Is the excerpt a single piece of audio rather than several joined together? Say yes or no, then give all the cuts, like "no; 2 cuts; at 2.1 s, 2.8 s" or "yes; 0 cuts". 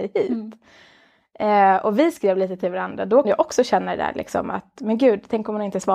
no; 1 cut; at 3.2 s